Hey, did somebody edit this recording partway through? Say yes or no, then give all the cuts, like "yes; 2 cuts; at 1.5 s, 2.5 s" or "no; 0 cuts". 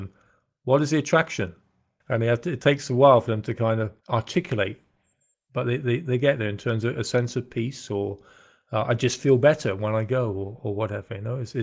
yes; 1 cut; at 4.0 s